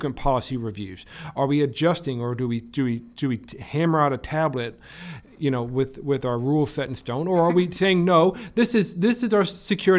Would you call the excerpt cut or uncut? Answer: uncut